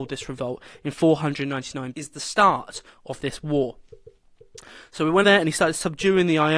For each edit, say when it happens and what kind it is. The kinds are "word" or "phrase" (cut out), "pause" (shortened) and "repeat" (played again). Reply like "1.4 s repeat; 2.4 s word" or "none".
1.9 s phrase; 5.2 s word